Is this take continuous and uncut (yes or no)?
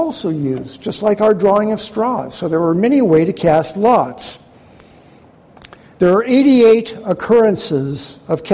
yes